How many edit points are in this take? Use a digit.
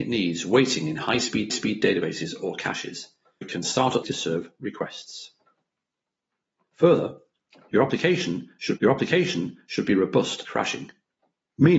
5